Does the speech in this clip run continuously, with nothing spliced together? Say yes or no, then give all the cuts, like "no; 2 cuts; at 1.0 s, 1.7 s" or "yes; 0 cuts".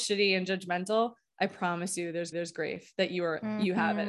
no; 1 cut; at 2.3 s